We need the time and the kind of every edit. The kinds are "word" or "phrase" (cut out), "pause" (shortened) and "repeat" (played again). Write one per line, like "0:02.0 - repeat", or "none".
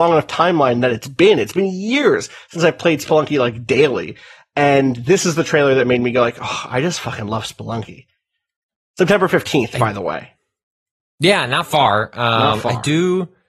none